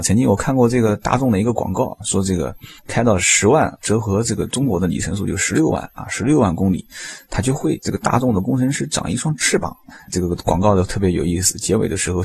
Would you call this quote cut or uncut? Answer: cut